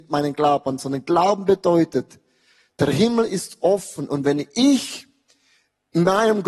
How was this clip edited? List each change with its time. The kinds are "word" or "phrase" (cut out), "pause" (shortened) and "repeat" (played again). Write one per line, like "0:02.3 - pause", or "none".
none